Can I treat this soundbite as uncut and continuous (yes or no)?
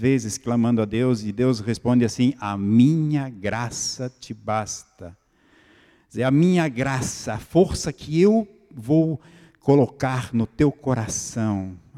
yes